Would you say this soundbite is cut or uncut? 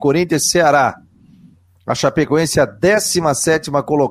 uncut